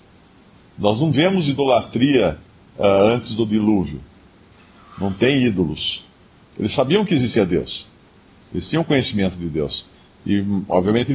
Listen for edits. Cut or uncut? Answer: uncut